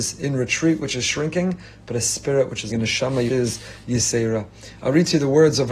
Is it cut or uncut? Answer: cut